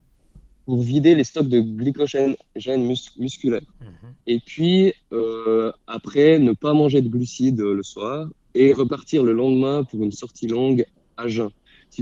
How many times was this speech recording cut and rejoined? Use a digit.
2